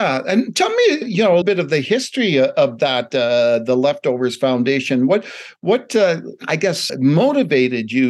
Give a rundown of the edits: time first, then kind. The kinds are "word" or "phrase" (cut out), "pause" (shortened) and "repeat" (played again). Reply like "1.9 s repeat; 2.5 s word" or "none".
1.0 s word; 1.4 s word; 6.9 s word